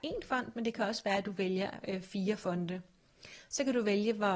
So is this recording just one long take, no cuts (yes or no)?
yes